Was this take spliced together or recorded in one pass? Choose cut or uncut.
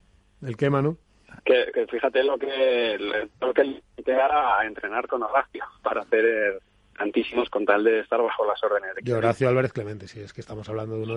cut